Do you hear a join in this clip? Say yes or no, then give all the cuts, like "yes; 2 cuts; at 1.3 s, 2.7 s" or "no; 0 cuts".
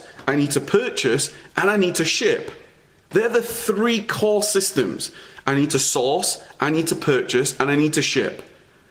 no; 0 cuts